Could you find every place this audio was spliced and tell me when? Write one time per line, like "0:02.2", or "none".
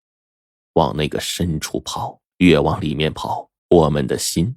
0:02.3
0:03.6